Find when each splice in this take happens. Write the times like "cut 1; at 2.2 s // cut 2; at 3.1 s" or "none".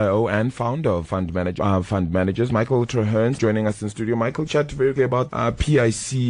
cut 1; at 1.0 s // cut 2; at 1.6 s // cut 3; at 3.4 s // cut 4; at 4.5 s // cut 5; at 5.0 s // cut 6; at 5.3 s